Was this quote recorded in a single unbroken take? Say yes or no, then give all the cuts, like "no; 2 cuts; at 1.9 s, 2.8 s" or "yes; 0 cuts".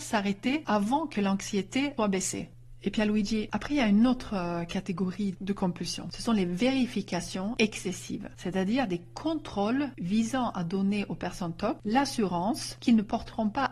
yes; 0 cuts